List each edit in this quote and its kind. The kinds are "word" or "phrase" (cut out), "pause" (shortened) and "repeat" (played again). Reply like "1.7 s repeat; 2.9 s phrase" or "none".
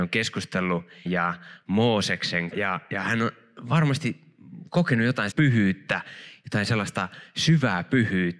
1.1 s word; 2.5 s phrase; 5.3 s word